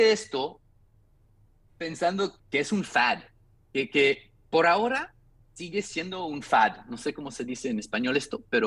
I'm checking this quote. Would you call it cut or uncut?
cut